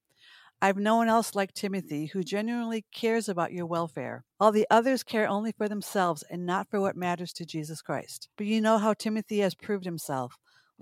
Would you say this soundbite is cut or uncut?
cut